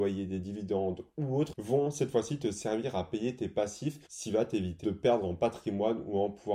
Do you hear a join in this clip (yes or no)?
yes